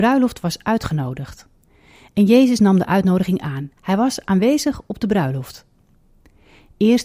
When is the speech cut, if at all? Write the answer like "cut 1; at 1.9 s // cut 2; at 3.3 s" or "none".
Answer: cut 1; at 3.8 s